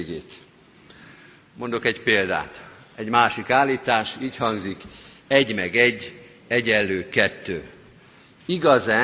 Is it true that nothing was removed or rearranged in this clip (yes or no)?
yes